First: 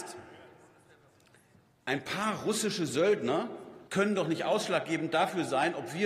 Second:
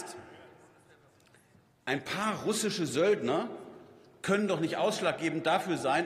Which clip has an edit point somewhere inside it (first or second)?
first